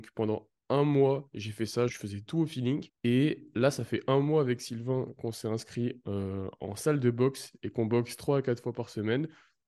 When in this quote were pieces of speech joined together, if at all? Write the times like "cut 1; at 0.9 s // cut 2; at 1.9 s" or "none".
cut 1; at 1.9 s // cut 2; at 2.9 s

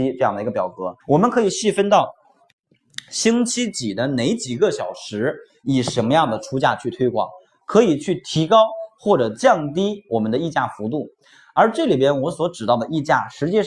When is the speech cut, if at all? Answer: cut 1; at 1.0 s

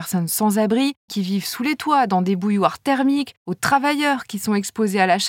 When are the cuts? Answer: cut 1; at 1.1 s

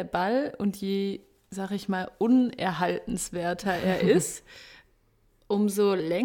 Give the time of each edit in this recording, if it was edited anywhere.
none

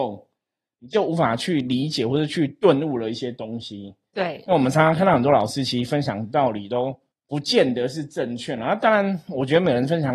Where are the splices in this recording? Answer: cut 1; at 7.1 s

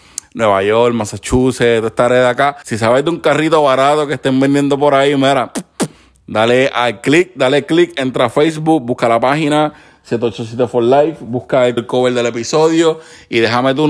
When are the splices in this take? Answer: cut 1; at 11.8 s

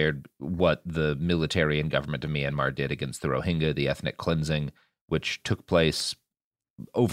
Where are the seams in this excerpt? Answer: none

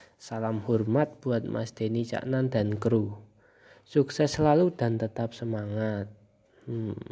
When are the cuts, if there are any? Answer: none

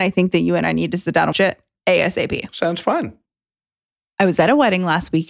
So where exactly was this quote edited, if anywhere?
cut 1; at 1.3 s

